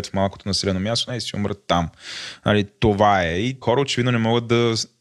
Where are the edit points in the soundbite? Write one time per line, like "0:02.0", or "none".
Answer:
0:01.1
0:03.6